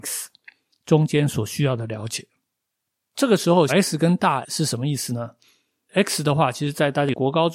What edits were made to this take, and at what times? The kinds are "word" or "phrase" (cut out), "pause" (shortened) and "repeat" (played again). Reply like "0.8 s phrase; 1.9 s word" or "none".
3.7 s word; 4.4 s word